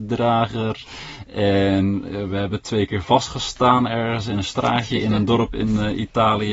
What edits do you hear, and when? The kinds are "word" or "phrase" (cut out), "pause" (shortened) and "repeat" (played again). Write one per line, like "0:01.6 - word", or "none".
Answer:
none